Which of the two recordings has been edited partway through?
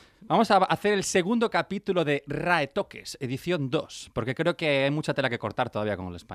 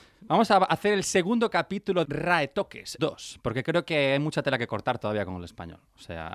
second; 2 cuts; at 2.0 s, 3.0 s

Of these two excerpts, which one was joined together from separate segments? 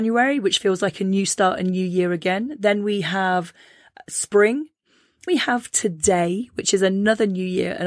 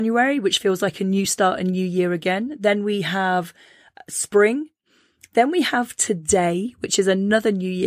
first; 1 cut; at 5.3 s

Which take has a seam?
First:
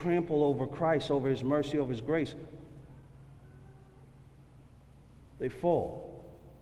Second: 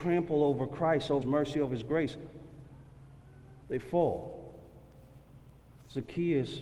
second; 2 cuts; at 1.2 s, 3.6 s

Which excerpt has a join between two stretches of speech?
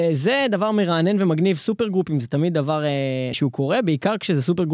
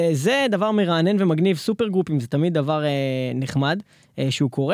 first; 1 cut; at 3.3 s

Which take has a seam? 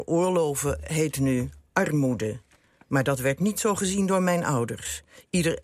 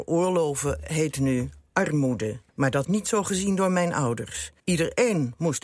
second; 3 cuts; at 2.5 s, 2.8 s, 4.6 s

